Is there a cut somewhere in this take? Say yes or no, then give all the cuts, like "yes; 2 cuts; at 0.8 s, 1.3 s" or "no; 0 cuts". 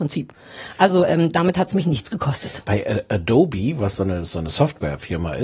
no; 0 cuts